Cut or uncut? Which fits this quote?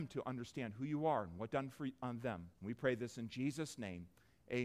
cut